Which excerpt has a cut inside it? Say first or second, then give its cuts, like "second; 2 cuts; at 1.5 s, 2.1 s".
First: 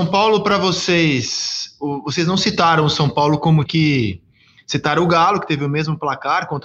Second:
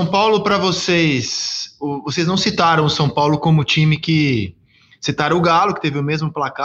first; 1 cut; at 3.7 s